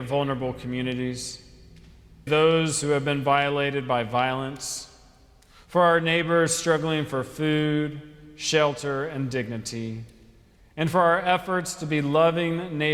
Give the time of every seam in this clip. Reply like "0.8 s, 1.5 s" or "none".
2.3 s

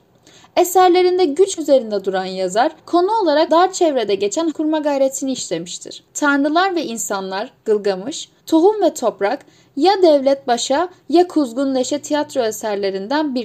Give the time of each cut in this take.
1.6 s, 2.8 s, 3.5 s, 4.5 s, 6.1 s, 8.4 s

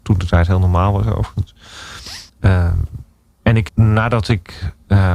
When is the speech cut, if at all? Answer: 2.3 s, 3.7 s

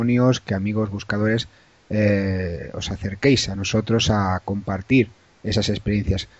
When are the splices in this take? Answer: none

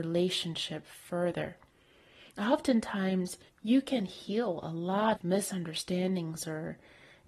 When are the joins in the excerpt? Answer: 3.5 s, 5.1 s

